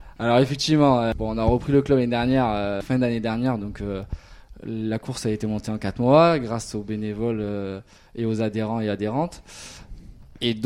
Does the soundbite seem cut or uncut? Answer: uncut